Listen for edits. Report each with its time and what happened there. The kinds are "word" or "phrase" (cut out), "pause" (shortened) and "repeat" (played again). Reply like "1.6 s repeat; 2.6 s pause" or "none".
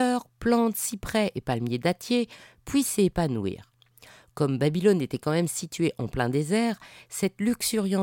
none